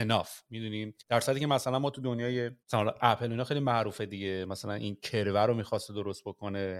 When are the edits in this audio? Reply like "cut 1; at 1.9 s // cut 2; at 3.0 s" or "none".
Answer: cut 1; at 1.0 s // cut 2; at 2.6 s